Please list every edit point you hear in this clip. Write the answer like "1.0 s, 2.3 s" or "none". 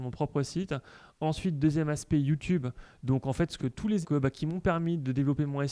3.6 s, 4.0 s